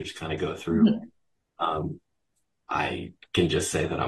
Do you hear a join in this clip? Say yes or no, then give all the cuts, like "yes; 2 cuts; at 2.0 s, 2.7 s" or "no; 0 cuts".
no; 0 cuts